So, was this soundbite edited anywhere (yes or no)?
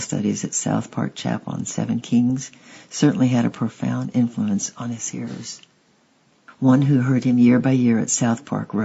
no